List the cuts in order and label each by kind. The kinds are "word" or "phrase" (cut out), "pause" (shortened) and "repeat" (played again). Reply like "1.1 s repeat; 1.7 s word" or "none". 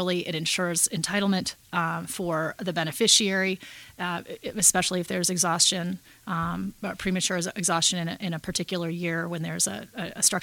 none